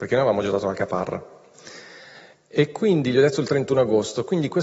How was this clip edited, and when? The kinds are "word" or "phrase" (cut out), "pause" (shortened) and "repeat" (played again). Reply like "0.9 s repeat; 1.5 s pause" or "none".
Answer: none